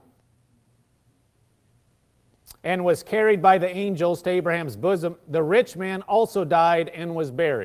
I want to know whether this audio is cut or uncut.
cut